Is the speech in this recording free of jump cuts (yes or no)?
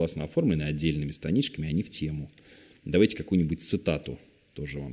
yes